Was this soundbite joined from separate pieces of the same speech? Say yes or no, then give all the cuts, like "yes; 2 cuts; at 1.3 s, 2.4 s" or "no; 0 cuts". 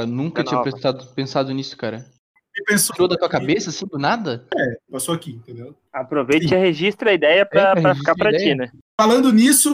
yes; 2 cuts; at 2.9 s, 4.9 s